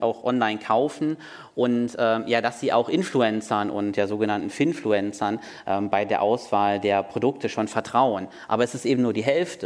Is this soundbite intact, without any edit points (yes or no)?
yes